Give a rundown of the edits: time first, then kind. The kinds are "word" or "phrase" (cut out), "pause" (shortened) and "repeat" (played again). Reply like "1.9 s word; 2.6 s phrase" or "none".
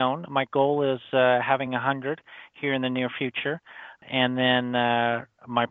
none